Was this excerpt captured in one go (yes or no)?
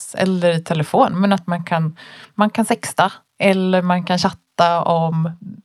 yes